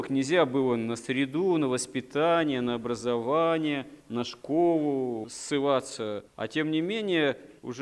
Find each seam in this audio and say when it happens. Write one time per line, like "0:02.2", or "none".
0:04.0